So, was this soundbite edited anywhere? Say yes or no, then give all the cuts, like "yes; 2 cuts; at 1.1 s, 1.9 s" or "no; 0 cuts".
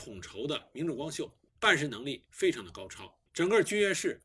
yes; 2 cuts; at 1.5 s, 3.3 s